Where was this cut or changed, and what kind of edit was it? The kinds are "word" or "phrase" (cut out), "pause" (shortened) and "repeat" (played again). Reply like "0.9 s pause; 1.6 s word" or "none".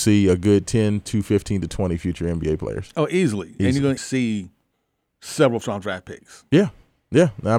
4.0 s phrase; 5.6 s word